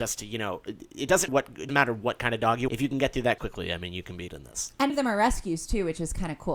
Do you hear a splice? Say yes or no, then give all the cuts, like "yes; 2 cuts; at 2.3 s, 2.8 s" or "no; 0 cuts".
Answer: yes; 6 cuts; at 1.3 s, 1.7 s, 2.7 s, 3.4 s, 4.3 s, 4.9 s